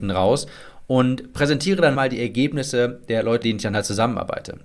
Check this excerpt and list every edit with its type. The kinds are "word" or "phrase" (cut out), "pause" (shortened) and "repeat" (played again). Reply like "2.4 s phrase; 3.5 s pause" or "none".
1.9 s word; 3.4 s word

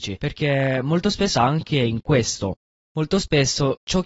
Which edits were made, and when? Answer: 1.4 s word

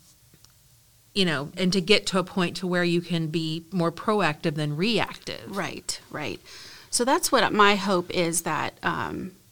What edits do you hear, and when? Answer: 1.5 s word

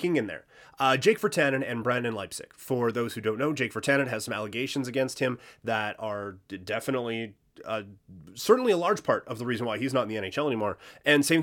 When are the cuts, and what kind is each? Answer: none

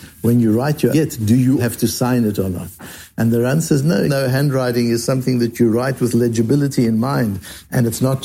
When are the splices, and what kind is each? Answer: 0.9 s word; 1.6 s word; 4.1 s word

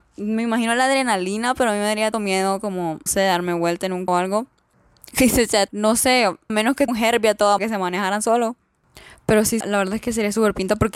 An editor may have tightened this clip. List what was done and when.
2.1 s word; 3.1 s word; 4.1 s word; 5.7 s word; 6.5 s word; 6.9 s word; 7.6 s word; 9.6 s word

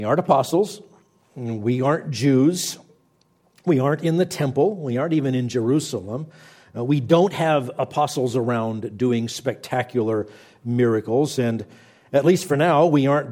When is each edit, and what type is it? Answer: none

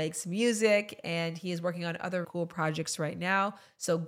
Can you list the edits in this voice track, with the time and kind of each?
2.2 s word

